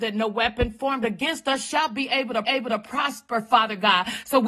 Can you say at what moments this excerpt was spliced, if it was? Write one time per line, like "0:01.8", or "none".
0:02.4